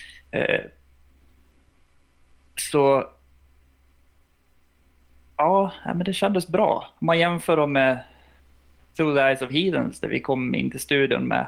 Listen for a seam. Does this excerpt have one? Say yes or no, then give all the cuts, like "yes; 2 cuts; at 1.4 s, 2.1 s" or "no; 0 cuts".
no; 0 cuts